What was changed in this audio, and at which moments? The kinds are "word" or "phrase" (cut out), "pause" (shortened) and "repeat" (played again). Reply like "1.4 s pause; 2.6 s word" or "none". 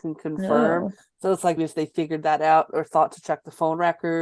1.6 s word